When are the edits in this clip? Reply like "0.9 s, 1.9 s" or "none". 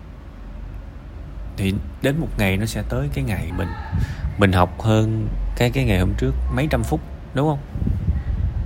3.5 s

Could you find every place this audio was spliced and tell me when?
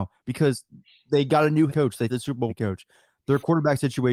1.7 s, 2.1 s, 2.5 s

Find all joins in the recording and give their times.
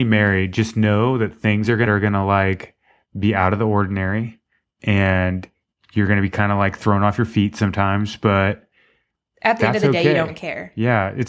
1.9 s

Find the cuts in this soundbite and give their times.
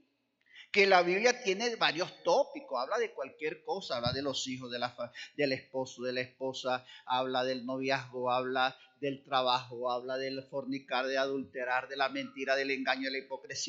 none

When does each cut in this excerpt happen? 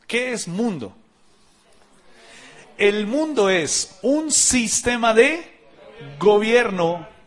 none

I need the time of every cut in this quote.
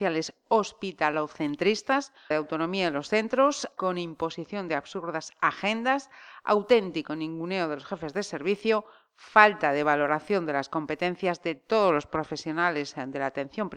2.3 s, 3.8 s

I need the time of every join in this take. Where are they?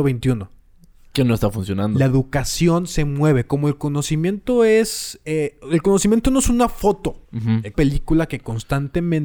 7.3 s, 7.7 s

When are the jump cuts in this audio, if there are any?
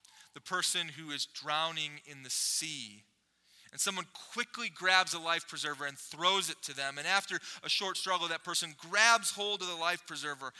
none

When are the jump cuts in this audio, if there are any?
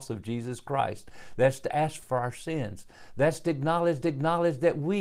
2.0 s, 4.0 s

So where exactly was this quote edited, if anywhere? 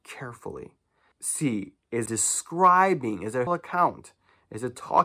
1.1 s, 2.1 s, 3.5 s

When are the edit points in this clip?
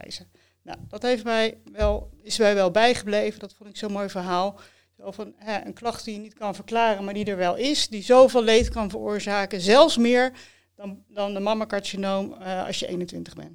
none

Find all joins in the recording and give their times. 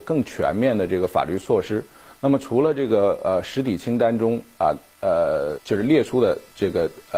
5.6 s

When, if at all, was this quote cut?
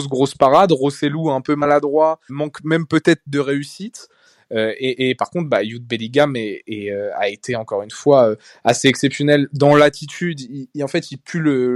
2.3 s

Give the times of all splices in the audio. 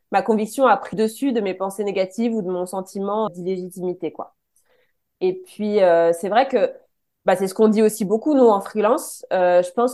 0.9 s, 3.3 s

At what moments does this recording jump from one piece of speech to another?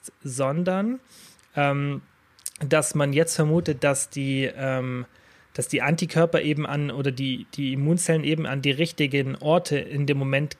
none

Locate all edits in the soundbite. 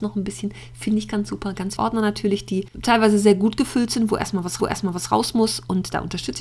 1.8 s, 4.6 s

